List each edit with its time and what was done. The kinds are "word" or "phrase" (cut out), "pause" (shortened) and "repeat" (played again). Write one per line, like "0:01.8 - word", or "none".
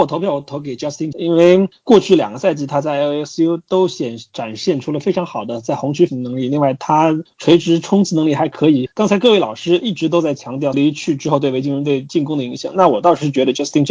0:01.1 - word
0:06.1 - word
0:10.7 - phrase